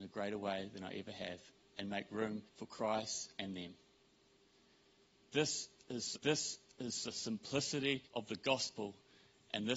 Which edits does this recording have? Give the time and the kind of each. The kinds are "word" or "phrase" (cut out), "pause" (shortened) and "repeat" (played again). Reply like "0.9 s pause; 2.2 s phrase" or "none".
2.5 s pause; 6.2 s repeat; 8.1 s pause

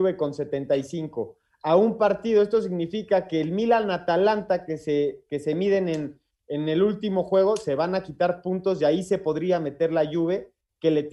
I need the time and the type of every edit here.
none

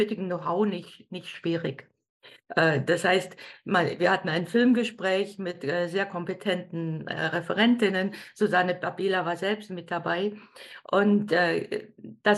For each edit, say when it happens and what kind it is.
none

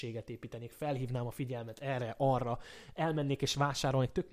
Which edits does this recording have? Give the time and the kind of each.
none

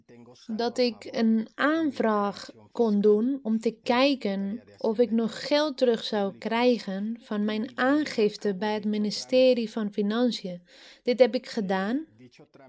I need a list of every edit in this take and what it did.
none

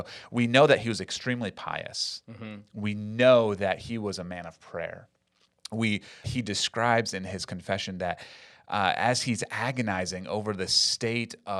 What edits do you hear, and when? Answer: 6.2 s word

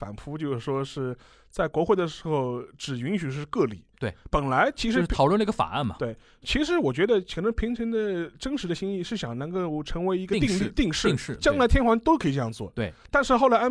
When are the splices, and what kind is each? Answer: none

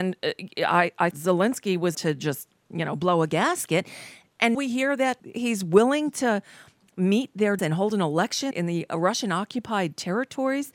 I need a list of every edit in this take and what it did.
1.1 s word; 1.9 s word; 4.5 s word; 7.6 s word; 8.5 s word

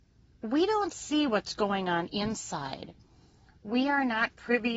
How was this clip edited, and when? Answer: none

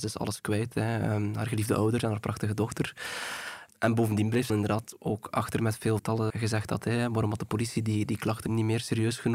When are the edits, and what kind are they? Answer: 4.5 s word; 6.0 s phrase; 6.3 s word; 8.5 s word

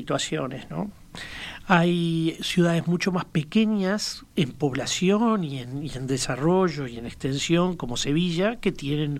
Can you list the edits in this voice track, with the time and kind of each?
4.3 s pause

